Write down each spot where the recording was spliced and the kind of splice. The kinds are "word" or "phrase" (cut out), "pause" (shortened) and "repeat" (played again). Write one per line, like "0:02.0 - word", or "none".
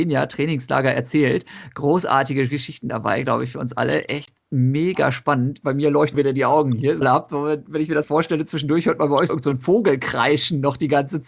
0:06.1 - word
0:07.0 - phrase
0:08.0 - word
0:09.3 - word